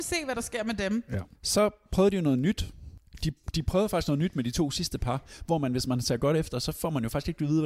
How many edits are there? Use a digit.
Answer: 1